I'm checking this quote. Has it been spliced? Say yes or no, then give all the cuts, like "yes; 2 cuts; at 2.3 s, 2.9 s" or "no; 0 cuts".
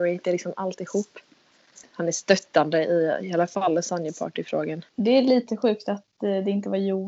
yes; 1 cut; at 4.9 s